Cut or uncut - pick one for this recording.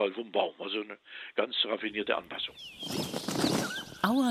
uncut